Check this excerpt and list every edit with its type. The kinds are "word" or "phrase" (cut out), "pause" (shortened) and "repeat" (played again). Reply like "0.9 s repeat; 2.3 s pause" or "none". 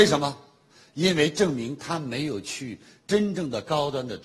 none